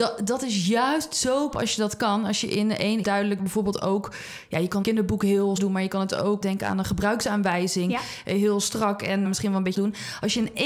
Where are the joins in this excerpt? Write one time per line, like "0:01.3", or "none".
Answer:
0:01.5
0:03.0
0:03.4
0:04.8
0:05.6
0:06.4
0:09.2
0:09.7

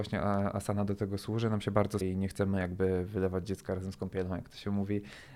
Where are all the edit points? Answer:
0:02.0

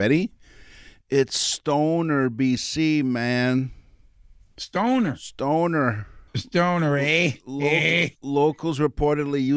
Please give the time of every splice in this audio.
0:06.3

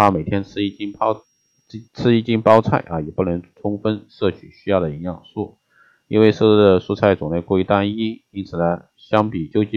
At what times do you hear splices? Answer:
0:01.8

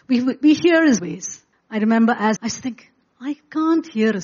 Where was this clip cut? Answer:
0:01.0
0:01.5
0:02.4

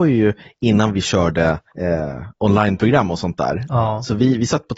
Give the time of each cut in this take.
0:01.7

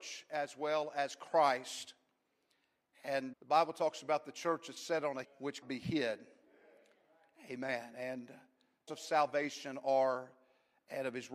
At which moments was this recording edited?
0:03.3
0:05.2
0:05.6
0:08.9

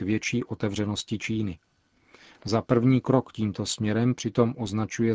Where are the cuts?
none

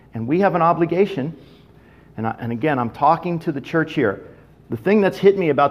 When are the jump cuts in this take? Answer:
none

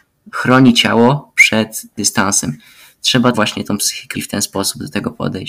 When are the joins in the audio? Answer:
0:02.0
0:03.3
0:04.1

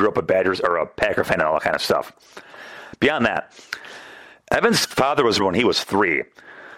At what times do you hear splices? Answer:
0:05.4

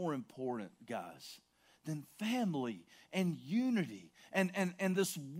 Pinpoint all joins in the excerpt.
none

